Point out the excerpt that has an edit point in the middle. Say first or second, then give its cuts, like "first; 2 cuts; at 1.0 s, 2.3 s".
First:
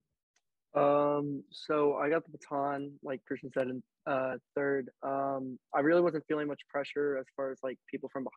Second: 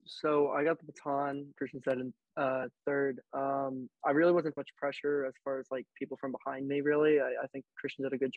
second; 2 cuts; at 1.5 s, 4.6 s